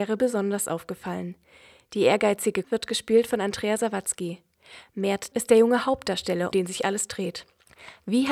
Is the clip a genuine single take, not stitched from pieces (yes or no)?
no